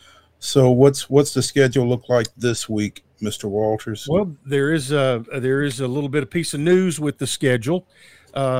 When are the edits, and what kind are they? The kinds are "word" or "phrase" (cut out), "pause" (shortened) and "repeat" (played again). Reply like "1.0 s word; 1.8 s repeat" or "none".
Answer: none